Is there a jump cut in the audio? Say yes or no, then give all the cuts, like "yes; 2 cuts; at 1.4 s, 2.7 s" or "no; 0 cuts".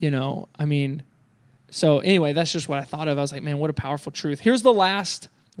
no; 0 cuts